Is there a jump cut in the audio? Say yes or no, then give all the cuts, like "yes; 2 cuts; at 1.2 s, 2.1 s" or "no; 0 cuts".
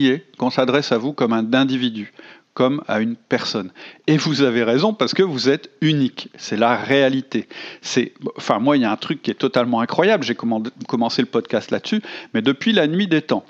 no; 0 cuts